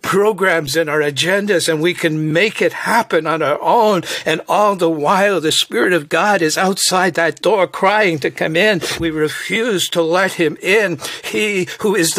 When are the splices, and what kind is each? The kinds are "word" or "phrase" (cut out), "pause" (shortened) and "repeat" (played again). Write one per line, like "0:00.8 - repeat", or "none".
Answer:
0:09.0 - word